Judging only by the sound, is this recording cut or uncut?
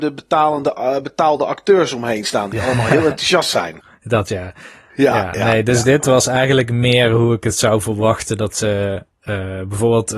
uncut